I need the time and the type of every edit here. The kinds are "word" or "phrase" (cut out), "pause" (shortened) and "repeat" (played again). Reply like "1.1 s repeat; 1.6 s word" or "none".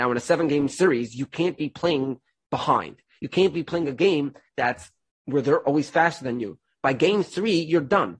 none